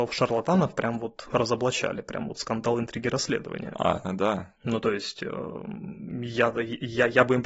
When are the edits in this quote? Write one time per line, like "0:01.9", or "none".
0:04.6